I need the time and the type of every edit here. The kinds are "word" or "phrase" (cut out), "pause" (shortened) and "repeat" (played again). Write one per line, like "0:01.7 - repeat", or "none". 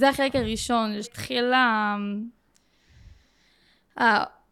0:01.0 - word